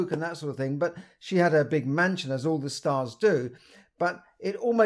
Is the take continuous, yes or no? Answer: yes